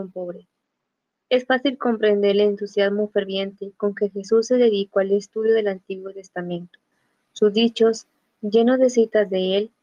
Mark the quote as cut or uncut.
uncut